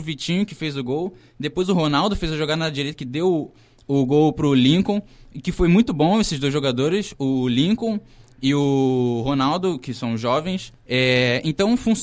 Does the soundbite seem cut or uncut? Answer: uncut